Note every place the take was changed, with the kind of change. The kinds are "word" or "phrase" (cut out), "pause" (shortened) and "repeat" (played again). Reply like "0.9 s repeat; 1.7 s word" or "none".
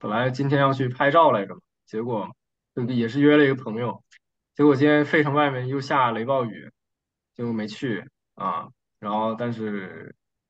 none